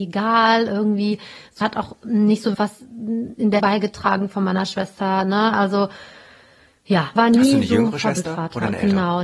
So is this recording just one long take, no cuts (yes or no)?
no